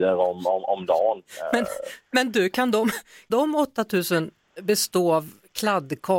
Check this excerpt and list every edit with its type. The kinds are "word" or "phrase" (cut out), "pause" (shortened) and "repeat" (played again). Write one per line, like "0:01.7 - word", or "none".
0:03.3 - word